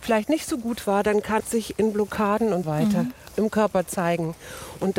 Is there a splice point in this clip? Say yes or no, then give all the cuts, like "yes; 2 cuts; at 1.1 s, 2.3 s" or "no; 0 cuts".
yes; 2 cuts; at 1.4 s, 2.6 s